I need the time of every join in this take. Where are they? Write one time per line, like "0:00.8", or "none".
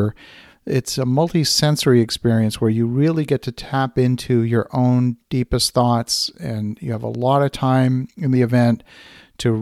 none